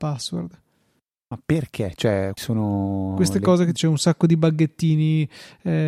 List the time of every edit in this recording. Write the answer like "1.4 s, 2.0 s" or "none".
2.4 s, 3.8 s